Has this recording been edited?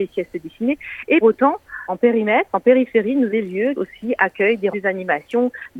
yes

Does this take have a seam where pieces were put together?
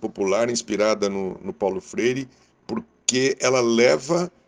no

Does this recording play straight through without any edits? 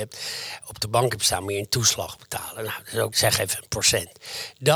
no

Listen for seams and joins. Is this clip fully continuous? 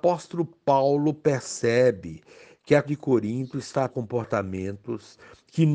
no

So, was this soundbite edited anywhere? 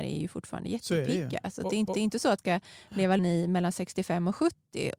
yes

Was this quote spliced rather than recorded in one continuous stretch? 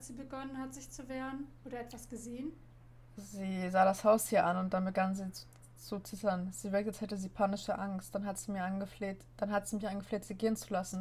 no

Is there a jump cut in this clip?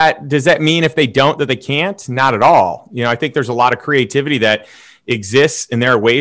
no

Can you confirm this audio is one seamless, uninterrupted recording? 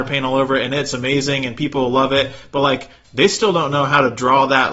yes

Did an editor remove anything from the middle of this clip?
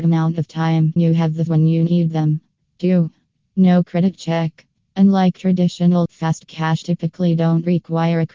yes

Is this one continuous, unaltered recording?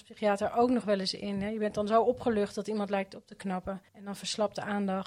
no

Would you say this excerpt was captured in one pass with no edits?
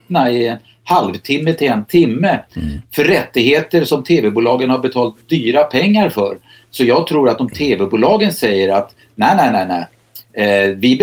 yes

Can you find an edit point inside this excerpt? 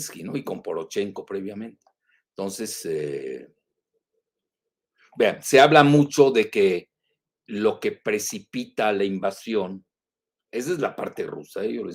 no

